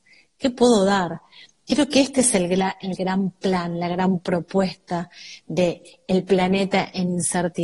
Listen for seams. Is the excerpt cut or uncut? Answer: uncut